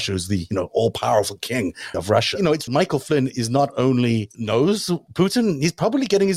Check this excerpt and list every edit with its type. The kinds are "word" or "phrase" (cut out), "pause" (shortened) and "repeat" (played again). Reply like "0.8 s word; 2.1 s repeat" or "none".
1.9 s word; 2.7 s phrase